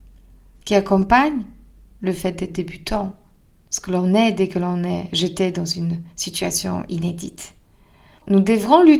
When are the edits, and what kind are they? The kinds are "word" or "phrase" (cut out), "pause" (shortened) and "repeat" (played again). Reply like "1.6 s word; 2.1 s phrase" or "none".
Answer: none